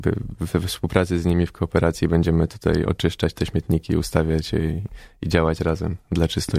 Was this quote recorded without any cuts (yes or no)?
yes